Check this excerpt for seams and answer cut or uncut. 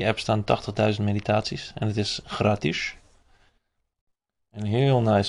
uncut